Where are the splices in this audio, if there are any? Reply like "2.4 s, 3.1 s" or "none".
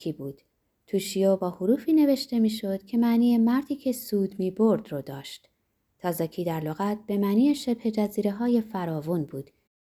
none